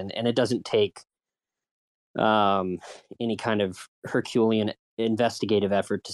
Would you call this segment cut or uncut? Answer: uncut